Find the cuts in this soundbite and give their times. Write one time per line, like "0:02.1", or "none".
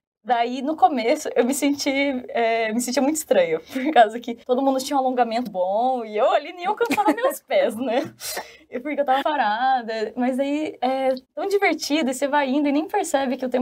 0:04.4
0:05.5
0:09.2
0:11.2